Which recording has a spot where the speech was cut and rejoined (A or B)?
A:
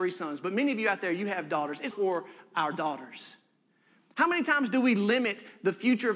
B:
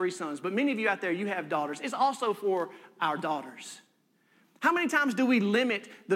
A